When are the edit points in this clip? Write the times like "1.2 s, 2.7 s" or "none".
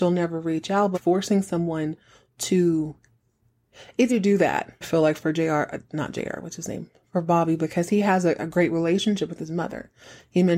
0.9 s, 4.1 s, 4.8 s